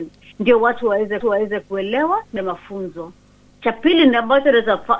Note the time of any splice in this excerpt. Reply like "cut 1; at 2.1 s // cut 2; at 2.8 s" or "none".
cut 1; at 1.2 s // cut 2; at 2.4 s // cut 3; at 3.5 s